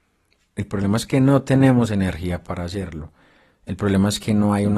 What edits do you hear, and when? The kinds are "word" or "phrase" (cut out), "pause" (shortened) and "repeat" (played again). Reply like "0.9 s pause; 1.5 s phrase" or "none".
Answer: none